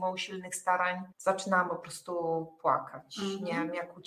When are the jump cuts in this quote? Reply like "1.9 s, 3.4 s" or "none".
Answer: 1.1 s